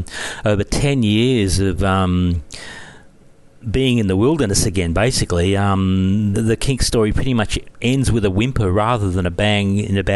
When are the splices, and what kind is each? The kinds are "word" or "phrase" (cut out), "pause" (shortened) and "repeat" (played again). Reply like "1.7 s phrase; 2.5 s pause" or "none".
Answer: 6.3 s word